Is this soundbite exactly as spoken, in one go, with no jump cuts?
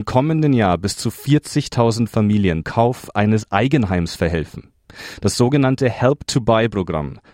no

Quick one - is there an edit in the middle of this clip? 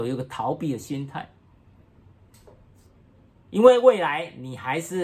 no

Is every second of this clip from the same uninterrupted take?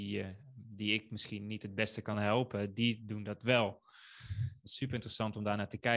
yes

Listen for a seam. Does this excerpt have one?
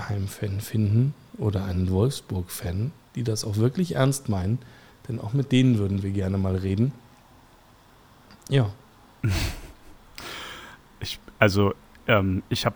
no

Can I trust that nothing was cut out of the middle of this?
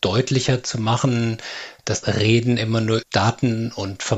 no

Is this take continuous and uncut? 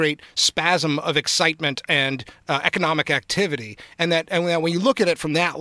yes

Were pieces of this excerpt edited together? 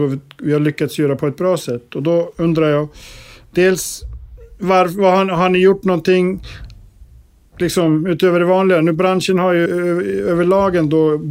yes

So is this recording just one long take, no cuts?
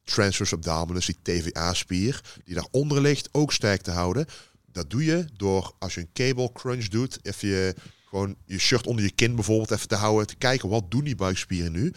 yes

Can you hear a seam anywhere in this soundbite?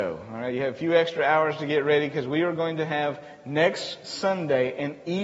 no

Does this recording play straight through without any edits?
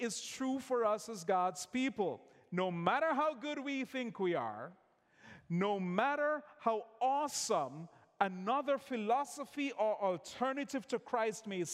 yes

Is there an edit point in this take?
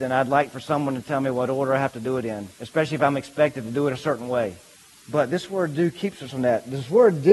yes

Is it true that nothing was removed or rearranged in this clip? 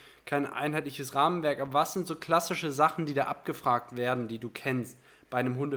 yes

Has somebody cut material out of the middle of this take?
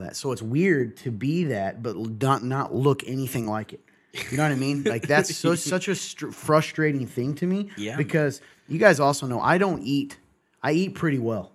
no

